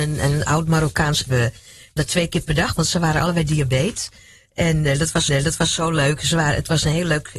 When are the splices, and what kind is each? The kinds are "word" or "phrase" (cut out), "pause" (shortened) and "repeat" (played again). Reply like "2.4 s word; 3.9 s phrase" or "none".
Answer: 1.3 s phrase; 2.0 s word; 5.3 s repeat